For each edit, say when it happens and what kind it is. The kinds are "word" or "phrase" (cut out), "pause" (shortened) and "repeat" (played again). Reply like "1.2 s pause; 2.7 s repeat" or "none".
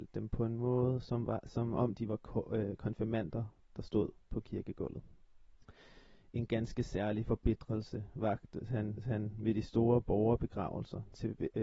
9.0 s repeat